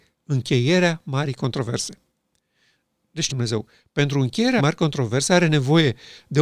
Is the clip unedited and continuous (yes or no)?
no